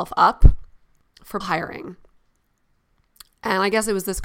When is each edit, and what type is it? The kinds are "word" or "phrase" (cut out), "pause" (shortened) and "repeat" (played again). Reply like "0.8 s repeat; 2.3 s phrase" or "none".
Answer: 1.4 s word